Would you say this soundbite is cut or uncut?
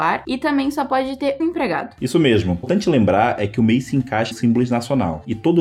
cut